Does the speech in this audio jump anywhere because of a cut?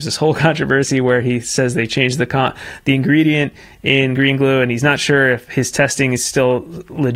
no; 0 cuts

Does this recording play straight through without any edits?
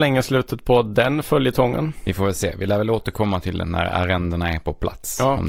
no; 1 cut; at 3.6 s

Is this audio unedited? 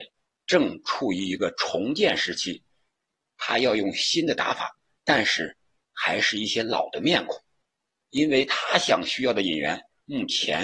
yes; 0 cuts

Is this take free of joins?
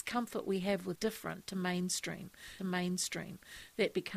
no; 2 cuts; at 1.0 s, 2.6 s

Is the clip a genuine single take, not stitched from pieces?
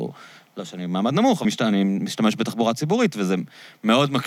no; 1 cut; at 1.4 s

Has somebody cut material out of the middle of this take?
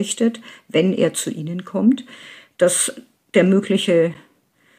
no; 0 cuts

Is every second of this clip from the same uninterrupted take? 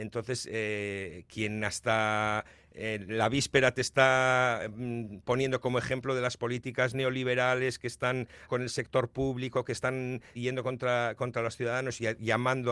no; 2 cuts; at 8.5 s, 10.3 s

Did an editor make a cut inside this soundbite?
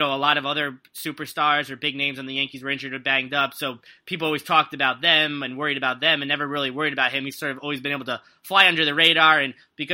no; 0 cuts

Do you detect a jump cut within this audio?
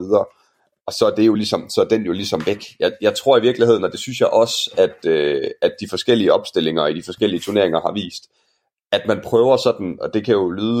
no; 0 cuts

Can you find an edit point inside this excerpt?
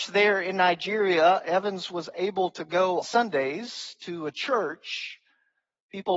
yes; 1 cut; at 3.0 s

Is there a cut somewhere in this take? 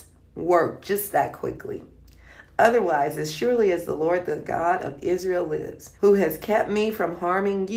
yes; 1 cut; at 6.0 s

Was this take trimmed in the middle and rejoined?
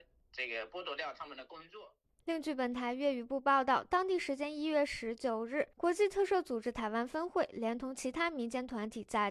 yes; 2 cuts; at 2.1 s, 5.7 s

